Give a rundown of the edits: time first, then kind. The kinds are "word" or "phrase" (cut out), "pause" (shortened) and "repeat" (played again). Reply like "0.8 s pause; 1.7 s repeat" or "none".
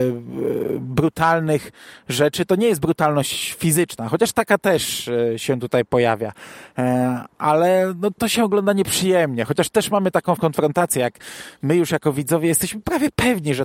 8.1 s word; 10.4 s word